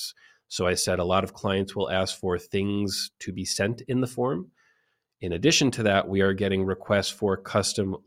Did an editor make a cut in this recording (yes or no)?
no